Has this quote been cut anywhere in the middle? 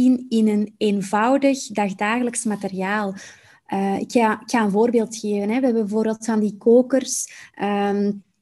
no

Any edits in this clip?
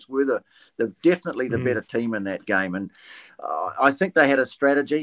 no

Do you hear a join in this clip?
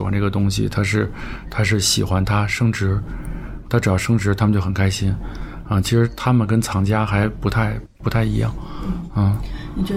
yes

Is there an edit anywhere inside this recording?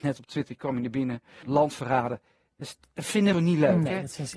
yes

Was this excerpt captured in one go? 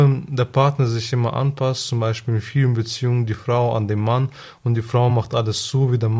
yes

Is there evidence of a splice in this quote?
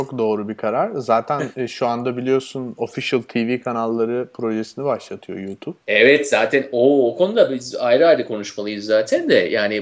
yes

